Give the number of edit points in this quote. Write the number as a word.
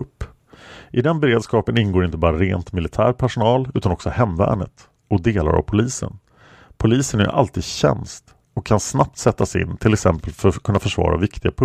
zero